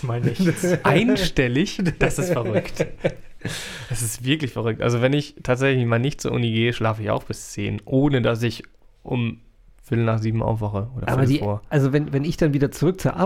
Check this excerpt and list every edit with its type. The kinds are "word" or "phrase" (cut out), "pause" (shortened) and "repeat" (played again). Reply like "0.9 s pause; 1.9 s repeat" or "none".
none